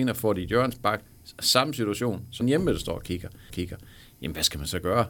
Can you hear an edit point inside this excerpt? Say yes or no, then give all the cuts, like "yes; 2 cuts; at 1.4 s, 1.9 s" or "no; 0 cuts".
yes; 2 cuts; at 2.4 s, 3.5 s